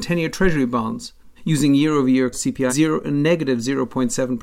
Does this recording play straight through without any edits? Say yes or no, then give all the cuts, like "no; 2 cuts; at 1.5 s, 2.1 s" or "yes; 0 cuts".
no; 3 cuts; at 1.4 s, 2.3 s, 2.7 s